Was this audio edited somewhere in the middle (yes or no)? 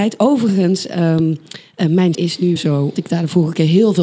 yes